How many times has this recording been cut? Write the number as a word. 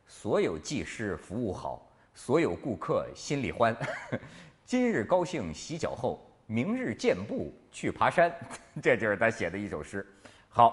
zero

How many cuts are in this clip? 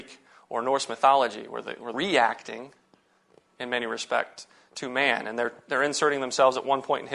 one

